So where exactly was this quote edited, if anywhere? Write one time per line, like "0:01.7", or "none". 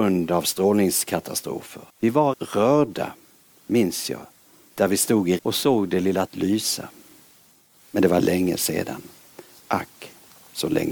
0:01.9
0:02.3
0:05.4
0:06.3